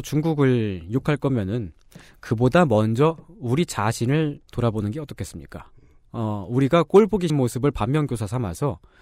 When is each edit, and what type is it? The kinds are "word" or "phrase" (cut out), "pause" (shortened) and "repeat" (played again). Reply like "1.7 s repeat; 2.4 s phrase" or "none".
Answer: 4.5 s pause; 7.3 s word